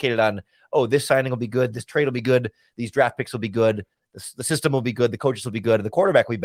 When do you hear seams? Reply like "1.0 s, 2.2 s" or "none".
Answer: none